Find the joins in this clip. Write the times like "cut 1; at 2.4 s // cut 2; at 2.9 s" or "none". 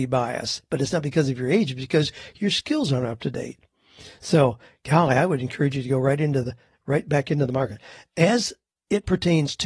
none